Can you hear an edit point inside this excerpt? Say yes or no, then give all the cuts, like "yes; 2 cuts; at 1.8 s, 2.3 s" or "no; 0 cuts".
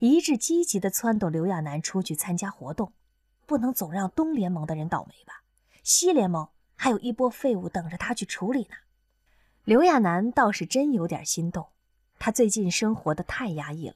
no; 0 cuts